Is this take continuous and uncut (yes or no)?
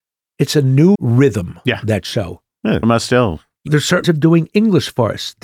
no